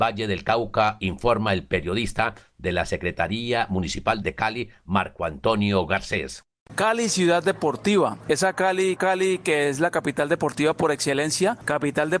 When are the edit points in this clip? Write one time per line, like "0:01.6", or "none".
0:04.2
0:09.0